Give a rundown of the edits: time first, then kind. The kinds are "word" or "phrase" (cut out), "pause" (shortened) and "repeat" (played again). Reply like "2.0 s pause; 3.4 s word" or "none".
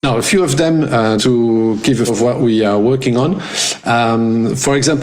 1.2 s word; 2.1 s word

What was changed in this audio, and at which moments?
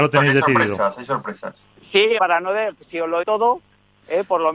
1.7 s pause; 2.2 s word; 3.2 s word

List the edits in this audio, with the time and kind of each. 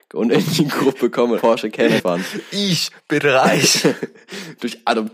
1.4 s word; 2.0 s word

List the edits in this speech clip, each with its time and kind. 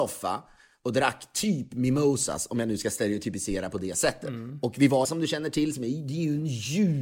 5.0 s phrase

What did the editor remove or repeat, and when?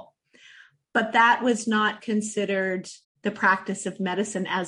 3.0 s pause

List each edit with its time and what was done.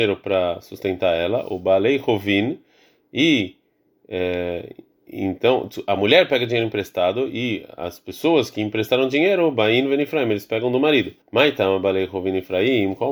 11.2 s pause

